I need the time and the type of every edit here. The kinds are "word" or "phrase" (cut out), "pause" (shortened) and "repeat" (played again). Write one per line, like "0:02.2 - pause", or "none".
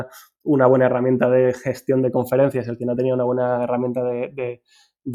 none